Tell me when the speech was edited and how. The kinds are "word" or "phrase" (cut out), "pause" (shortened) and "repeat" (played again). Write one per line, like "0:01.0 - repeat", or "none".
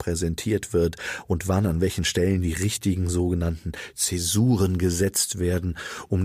none